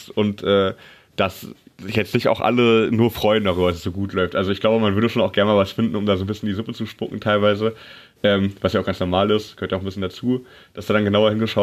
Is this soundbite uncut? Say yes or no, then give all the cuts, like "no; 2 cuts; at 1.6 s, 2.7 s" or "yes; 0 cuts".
yes; 0 cuts